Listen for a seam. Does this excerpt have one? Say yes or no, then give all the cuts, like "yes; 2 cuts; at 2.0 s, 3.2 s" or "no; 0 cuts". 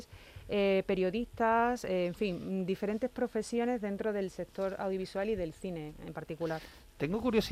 no; 0 cuts